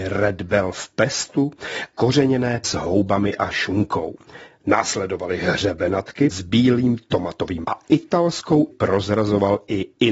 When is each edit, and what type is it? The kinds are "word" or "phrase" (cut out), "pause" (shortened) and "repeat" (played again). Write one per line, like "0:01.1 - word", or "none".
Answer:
0:01.9 - word
0:02.6 - word
0:06.3 - word
0:07.6 - word
0:08.7 - word